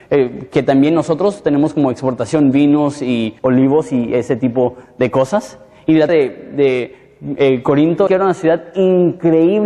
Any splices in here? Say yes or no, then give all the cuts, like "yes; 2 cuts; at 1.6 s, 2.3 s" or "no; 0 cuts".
yes; 3 cuts; at 3.4 s, 6.1 s, 8.1 s